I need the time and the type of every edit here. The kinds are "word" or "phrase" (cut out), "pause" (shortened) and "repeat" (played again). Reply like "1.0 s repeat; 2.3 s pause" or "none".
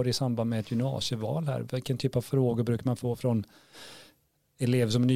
none